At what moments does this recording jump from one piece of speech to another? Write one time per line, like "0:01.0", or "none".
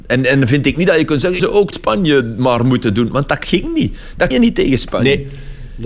0:01.4
0:01.7
0:04.3